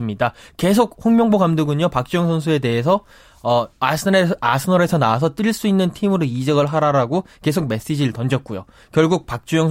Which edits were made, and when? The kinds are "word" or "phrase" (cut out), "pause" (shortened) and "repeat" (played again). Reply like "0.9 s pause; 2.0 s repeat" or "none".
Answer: none